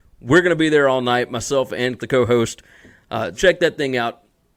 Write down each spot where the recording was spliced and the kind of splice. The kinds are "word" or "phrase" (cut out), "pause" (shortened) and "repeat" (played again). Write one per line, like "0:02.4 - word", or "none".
0:02.0 - word
0:03.3 - word